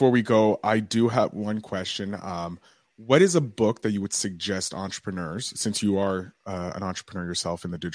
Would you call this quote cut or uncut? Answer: uncut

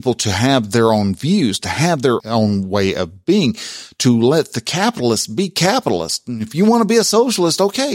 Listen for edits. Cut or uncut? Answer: cut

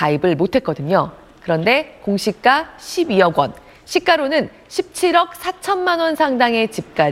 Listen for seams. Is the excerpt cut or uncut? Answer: uncut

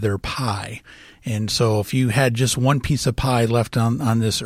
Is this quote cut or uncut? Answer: uncut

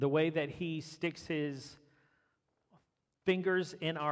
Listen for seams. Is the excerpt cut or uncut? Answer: uncut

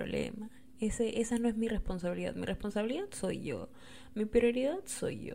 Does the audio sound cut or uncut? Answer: uncut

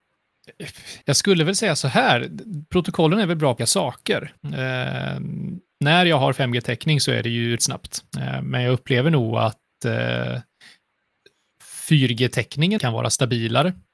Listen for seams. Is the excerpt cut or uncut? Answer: cut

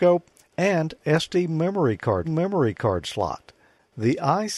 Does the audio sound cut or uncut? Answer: cut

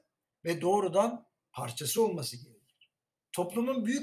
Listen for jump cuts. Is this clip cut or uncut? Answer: uncut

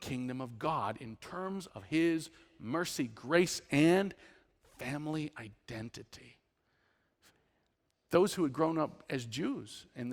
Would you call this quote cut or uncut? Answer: uncut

